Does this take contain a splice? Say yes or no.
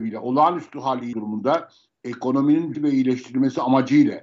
yes